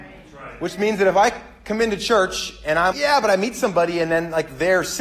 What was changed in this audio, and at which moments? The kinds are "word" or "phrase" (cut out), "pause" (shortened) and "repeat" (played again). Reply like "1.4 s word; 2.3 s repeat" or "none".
2.9 s word

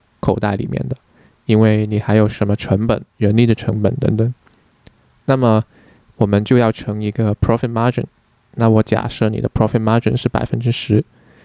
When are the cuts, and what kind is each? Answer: 3.1 s pause

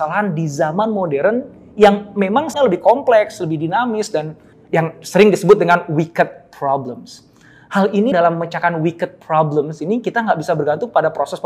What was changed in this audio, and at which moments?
2.5 s word; 4.5 s word; 8.1 s word

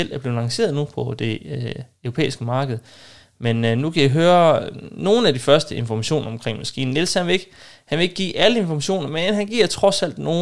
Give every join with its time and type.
none

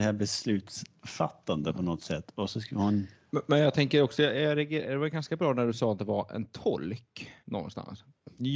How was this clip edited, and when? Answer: 3.1 s pause; 7.4 s pause

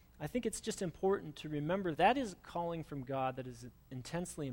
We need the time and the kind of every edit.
1.9 s word

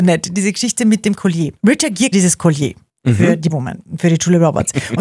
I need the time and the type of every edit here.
1.6 s pause; 2.1 s word; 3.5 s word

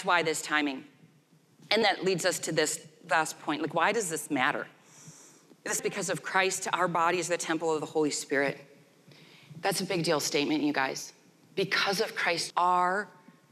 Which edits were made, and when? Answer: 1.8 s word; 5.8 s word; 12.5 s word

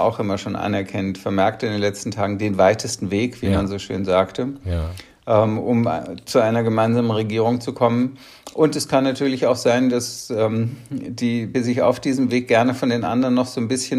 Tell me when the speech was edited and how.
11.5 s word

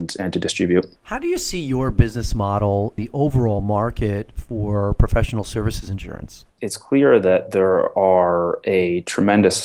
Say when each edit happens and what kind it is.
1.0 s pause; 3.0 s word; 6.5 s pause

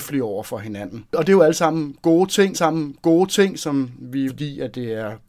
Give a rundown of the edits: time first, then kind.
1.1 s pause; 2.5 s repeat; 4.3 s phrase

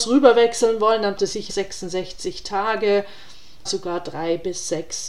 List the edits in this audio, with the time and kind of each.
1.2 s word; 1.5 s word; 3.7 s word

